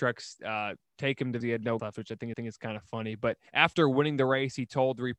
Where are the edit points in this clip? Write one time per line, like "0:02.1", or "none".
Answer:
0:01.4
0:01.8
0:02.3
0:03.5